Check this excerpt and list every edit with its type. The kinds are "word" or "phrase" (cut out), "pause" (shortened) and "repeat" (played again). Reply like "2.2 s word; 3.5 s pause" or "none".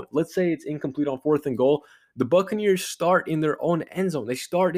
none